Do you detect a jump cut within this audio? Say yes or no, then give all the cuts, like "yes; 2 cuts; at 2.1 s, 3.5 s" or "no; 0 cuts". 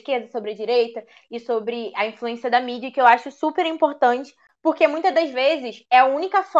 no; 0 cuts